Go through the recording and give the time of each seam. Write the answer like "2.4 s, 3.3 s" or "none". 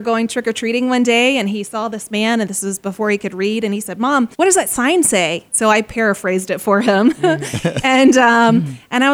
4.3 s